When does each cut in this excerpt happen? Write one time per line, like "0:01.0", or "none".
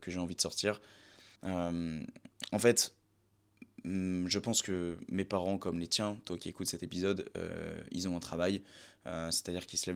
0:01.4